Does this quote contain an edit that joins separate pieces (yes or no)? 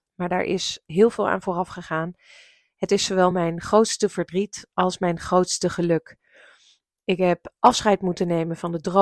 no